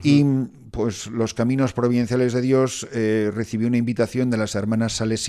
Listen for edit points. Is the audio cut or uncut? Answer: uncut